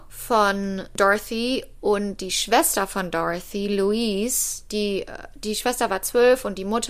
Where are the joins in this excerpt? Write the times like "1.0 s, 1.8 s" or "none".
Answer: none